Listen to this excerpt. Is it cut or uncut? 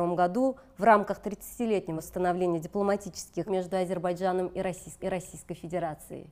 cut